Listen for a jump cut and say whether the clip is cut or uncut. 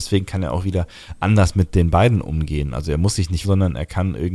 cut